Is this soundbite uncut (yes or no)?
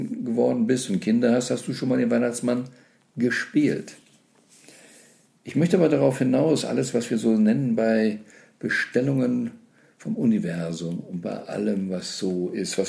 yes